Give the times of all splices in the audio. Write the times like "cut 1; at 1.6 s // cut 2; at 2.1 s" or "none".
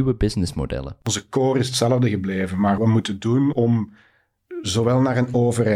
cut 1; at 1.0 s // cut 2; at 2.8 s // cut 3; at 3.5 s